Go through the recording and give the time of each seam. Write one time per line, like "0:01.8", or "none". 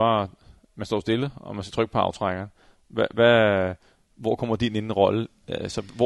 none